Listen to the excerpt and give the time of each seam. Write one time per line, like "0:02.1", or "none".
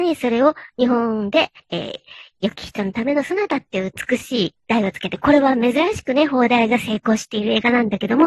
0:01.6
0:04.6